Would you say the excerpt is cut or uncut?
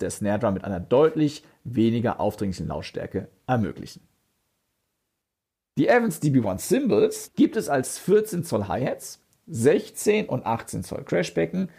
uncut